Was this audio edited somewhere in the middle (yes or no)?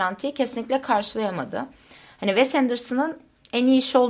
no